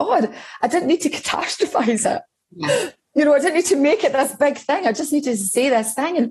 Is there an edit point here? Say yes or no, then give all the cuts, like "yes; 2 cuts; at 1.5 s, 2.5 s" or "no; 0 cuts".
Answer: no; 0 cuts